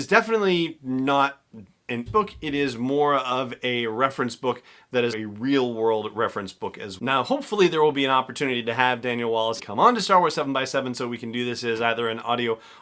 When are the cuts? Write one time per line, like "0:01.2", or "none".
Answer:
0:02.1
0:05.1
0:07.0
0:09.6

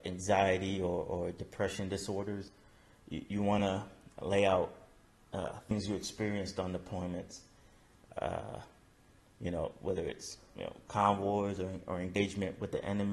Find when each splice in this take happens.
none

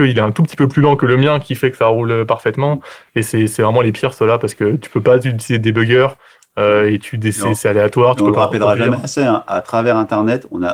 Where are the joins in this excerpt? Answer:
none

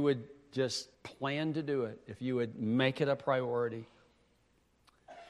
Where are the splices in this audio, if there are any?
0:00.9

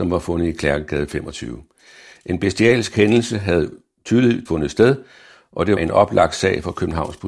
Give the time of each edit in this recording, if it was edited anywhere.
0:04.5
0:05.8

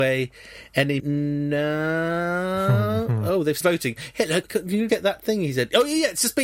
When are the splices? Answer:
0:01.0
0:03.6
0:04.4
0:04.9

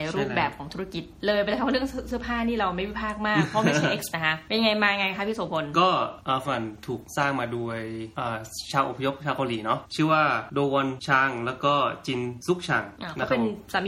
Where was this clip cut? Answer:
0:04.1
0:06.4

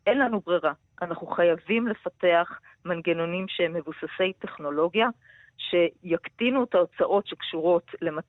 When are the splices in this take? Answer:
none

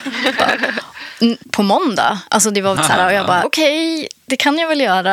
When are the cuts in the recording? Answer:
0:01.4
0:02.8
0:03.4

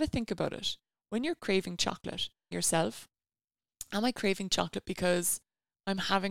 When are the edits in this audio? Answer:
0:02.5

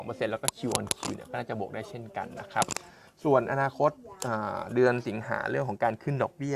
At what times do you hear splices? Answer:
none

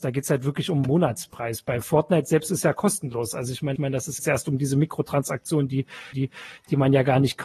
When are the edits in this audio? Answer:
0:03.8
0:04.2
0:06.1

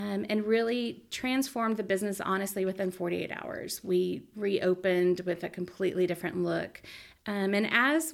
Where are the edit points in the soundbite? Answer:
none

